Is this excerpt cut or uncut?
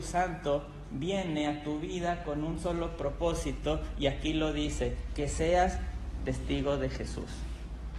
uncut